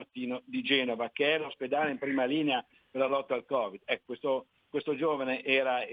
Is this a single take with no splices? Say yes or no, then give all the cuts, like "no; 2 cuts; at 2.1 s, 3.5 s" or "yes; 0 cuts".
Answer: yes; 0 cuts